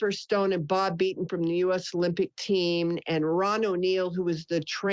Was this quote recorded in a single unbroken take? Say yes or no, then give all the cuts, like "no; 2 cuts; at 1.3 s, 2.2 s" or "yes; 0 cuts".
yes; 0 cuts